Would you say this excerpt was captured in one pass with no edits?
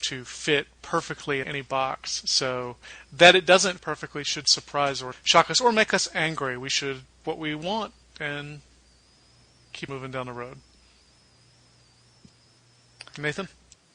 no; 6 cuts; at 1.4 s, 3.8 s, 4.4 s, 5.1 s, 7.2 s, 9.9 s

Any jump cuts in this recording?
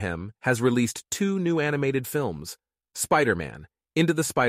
no; 0 cuts

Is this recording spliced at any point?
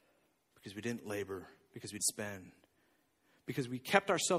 yes; 1 cut; at 2.0 s

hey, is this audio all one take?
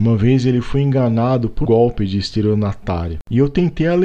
no; 1 cut; at 1.7 s

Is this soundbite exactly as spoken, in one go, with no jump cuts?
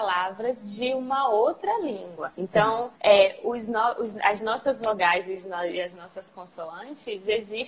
no; 2 cuts; at 2.3 s, 3.0 s

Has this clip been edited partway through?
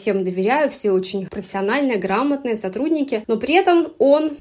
no; 0 cuts

